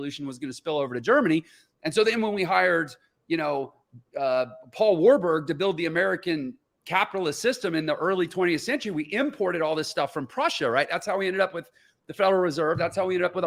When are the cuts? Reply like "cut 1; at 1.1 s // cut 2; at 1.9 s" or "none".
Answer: none